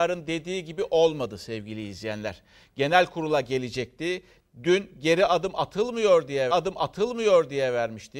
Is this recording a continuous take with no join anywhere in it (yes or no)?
no